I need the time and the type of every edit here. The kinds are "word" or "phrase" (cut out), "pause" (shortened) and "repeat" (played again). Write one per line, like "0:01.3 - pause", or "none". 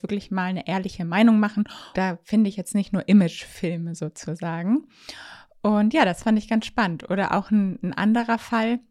0:01.9 - word